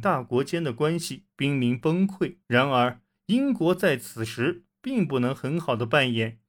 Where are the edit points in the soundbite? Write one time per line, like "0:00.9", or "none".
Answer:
0:02.4